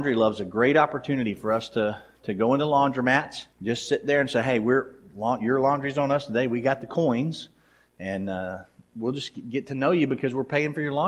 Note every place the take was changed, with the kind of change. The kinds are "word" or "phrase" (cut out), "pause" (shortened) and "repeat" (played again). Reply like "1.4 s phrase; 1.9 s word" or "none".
3.5 s pause